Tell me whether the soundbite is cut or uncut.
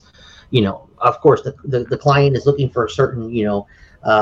cut